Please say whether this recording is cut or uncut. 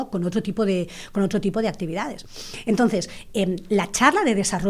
uncut